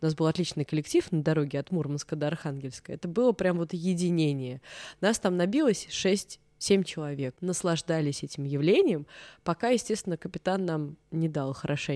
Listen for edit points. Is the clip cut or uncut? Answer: cut